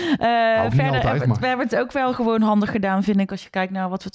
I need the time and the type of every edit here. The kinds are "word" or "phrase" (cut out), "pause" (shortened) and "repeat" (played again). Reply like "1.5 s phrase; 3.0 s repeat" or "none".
none